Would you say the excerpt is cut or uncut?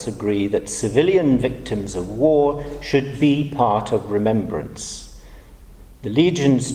uncut